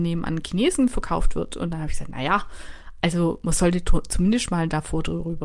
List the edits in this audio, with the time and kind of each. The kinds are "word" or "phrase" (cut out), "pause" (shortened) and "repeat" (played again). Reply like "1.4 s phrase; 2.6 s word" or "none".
none